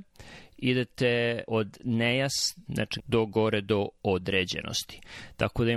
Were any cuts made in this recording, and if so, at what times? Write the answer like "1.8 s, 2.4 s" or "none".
1.5 s, 2.7 s, 3.0 s

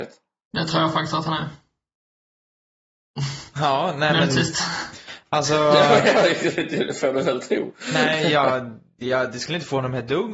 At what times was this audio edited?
3.5 s

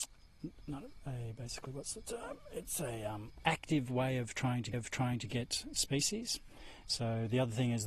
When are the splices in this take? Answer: 4.7 s

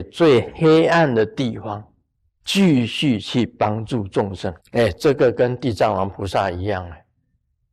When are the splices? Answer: 2.1 s, 4.6 s

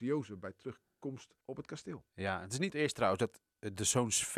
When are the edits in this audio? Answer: 1.4 s, 2.7 s

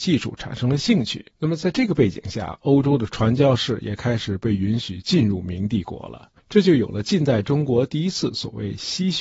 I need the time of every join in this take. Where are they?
1.3 s, 6.4 s

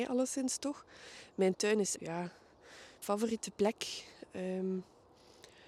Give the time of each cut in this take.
1.9 s, 3.0 s

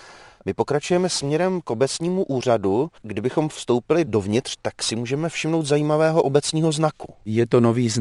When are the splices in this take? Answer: 3.0 s

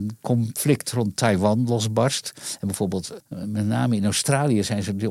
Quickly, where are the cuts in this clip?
3.2 s

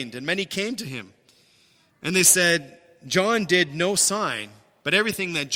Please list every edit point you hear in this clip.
none

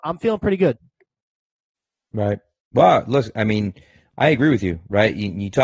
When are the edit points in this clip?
none

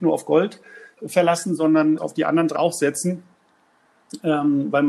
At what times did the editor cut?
2.0 s, 2.6 s

